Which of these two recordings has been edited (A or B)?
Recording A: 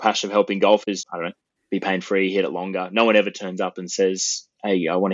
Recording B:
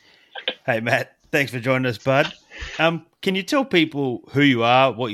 A